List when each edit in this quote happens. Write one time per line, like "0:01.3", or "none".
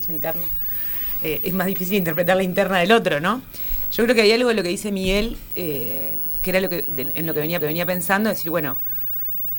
0:07.6

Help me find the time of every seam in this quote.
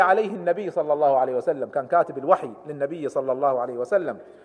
none

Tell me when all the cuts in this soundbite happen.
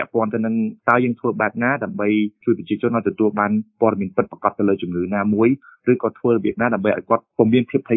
none

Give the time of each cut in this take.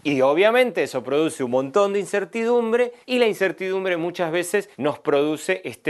0:03.0
0:04.7

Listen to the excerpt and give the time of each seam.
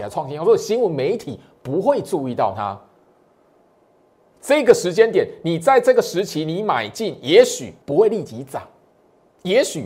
0:07.8

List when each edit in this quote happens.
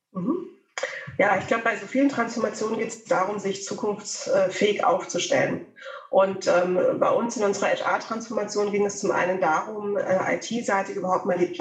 none

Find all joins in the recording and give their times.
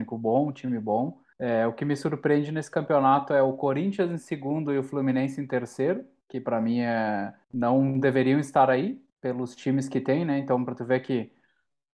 0:01.3
0:06.2
0:07.4
0:09.1

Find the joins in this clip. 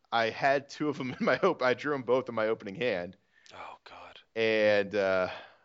none

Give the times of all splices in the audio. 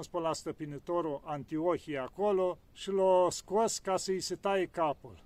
0:02.6

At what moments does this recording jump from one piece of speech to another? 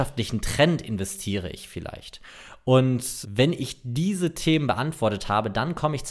0:03.2

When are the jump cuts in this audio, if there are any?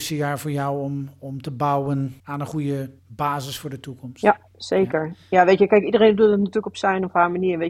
0:02.2
0:03.0
0:04.5

